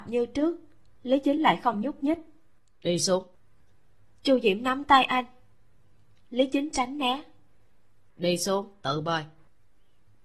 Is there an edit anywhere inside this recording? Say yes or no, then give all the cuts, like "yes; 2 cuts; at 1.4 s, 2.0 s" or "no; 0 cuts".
no; 0 cuts